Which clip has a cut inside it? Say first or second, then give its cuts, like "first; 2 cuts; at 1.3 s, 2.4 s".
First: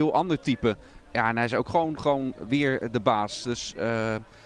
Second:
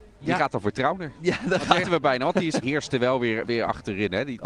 second; 3 cuts; at 1.8 s, 2.6 s, 3.5 s